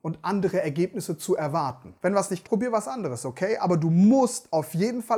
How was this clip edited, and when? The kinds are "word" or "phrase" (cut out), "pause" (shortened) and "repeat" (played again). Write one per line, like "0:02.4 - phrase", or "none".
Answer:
0:02.0 - pause
0:02.4 - word